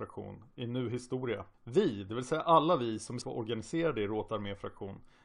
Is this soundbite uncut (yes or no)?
no